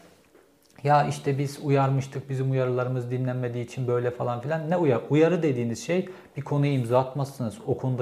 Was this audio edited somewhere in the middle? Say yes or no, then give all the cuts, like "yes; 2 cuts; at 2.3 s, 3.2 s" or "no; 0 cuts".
no; 0 cuts